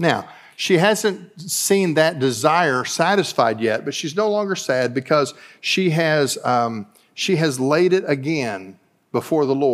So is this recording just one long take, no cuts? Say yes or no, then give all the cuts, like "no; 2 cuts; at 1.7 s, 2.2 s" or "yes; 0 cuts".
yes; 0 cuts